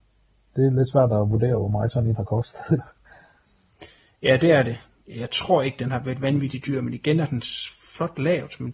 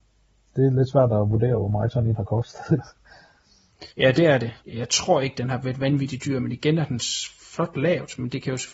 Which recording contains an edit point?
second; 2 cuts; at 3.9 s, 4.6 s

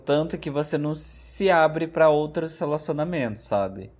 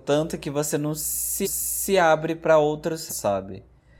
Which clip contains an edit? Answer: second; 2 cuts; at 1.4 s, 3.1 s

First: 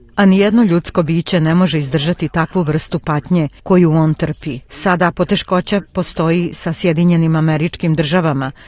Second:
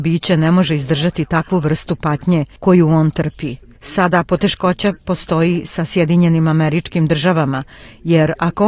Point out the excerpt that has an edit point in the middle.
first; 1 cut; at 4.7 s

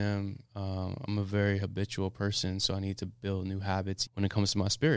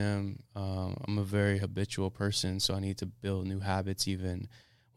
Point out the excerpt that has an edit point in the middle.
first; 1 cut; at 4.1 s

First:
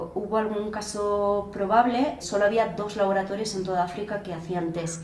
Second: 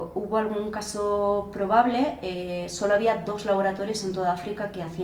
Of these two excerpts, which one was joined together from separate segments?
first; 1 cut; at 2.2 s

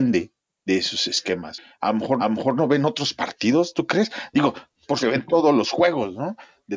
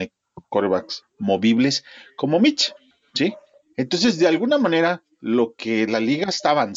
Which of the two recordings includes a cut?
first; 2 cuts; at 2.2 s, 5.0 s

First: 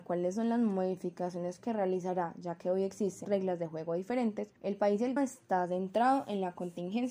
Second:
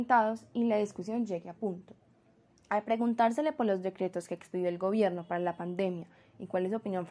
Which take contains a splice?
first; 3 cuts; at 3.2 s, 4.6 s, 5.2 s

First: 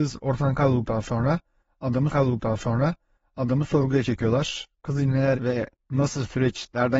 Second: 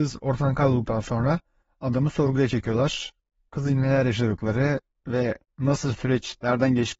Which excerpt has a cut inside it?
first; 3 cuts; at 2.1 s, 4.8 s, 5.3 s

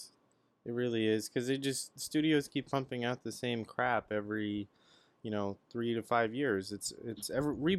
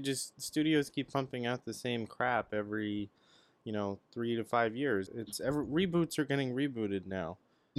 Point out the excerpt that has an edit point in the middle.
second; 1 cut; at 5.1 s

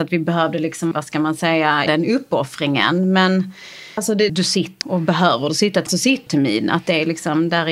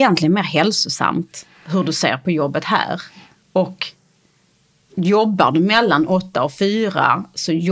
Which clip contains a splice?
first; 7 cuts; at 0.9 s, 1.9 s, 4.0 s, 4.3 s, 4.8 s, 5.9 s, 6.3 s

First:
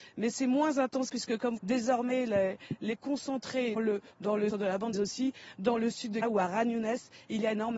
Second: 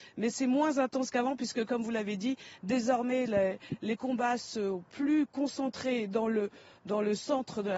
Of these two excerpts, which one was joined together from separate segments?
first; 8 cuts; at 1.1 s, 1.6 s, 3.0 s, 3.8 s, 4.1 s, 4.5 s, 4.9 s, 6.2 s

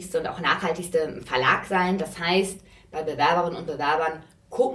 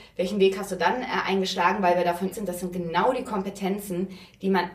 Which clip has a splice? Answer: second; 1 cut; at 2.3 s

